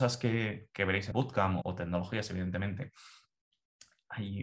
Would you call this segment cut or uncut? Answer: cut